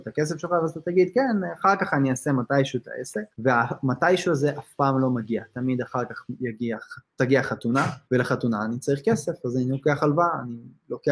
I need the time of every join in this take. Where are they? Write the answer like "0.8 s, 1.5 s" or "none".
3.3 s, 8.0 s